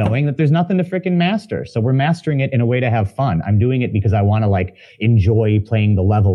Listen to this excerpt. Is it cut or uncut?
uncut